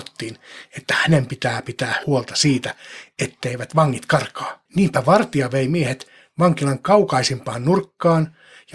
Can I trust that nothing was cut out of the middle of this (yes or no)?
no